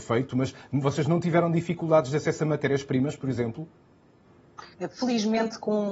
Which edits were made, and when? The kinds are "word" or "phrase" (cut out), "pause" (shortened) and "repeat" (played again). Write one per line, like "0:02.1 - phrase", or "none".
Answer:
0:04.7 - pause